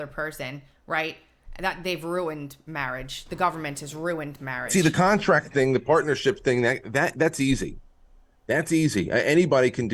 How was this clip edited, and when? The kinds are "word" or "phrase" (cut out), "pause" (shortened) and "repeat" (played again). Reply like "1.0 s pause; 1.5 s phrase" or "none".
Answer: none